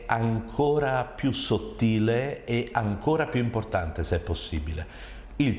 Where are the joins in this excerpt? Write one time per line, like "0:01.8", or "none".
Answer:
none